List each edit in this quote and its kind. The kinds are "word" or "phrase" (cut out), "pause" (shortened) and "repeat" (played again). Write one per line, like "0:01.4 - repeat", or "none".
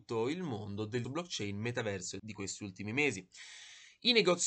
0:01.0 - word
0:02.2 - word